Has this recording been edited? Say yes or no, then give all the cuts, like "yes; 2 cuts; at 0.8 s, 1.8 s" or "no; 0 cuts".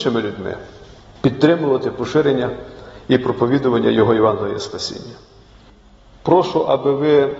no; 0 cuts